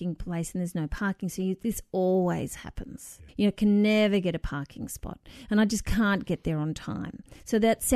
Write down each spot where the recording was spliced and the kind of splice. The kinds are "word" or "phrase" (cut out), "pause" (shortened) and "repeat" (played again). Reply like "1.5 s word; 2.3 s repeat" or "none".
3.3 s pause